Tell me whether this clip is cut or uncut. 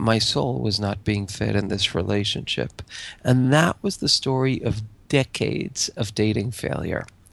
uncut